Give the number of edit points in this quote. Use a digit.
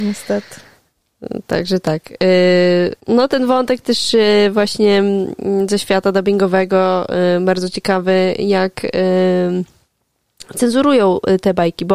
1